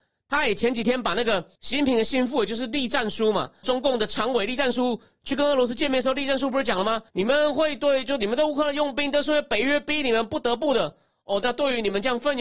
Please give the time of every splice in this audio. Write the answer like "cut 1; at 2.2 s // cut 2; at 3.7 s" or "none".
cut 1; at 1.6 s // cut 2; at 3.6 s // cut 3; at 7.1 s